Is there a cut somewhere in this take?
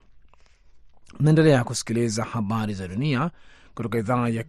no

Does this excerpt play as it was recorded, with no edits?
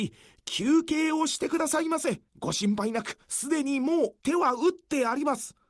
no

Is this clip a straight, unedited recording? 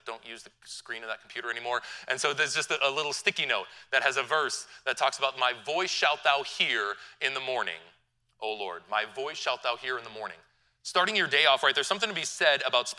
yes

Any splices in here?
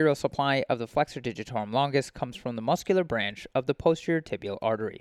no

